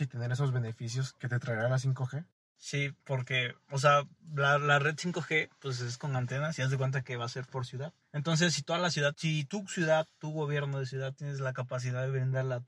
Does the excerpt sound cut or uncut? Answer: uncut